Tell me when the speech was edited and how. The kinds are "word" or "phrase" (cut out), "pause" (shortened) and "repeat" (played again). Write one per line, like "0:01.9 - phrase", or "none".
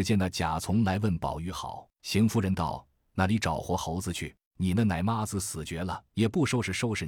0:01.9 - pause
0:04.4 - pause
0:06.1 - pause